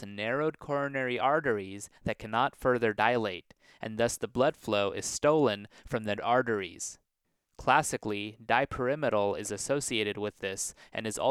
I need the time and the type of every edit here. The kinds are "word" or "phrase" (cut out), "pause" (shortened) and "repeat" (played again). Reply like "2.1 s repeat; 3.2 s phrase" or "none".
6.2 s word